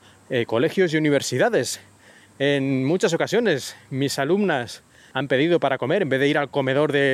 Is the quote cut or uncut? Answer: uncut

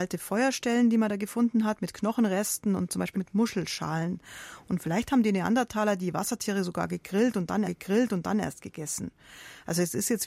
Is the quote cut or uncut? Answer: cut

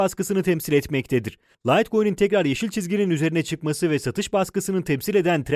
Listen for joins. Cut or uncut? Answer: uncut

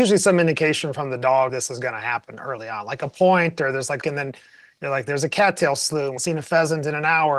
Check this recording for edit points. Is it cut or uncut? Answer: cut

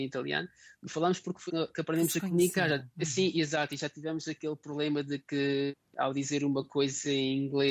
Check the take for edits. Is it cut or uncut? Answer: cut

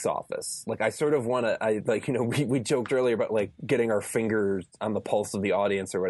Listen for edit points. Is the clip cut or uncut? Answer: uncut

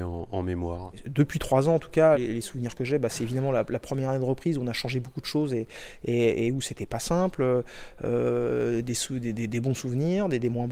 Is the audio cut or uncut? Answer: cut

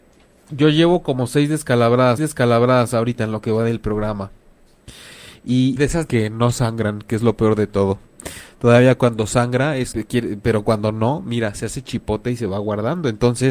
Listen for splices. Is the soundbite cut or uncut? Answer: cut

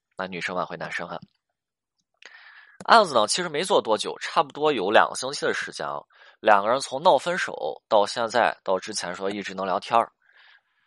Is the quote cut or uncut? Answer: uncut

